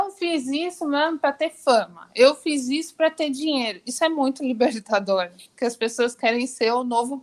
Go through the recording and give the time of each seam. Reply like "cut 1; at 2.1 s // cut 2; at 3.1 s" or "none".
none